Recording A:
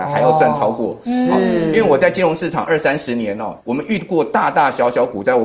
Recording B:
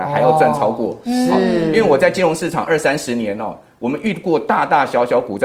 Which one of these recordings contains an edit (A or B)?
A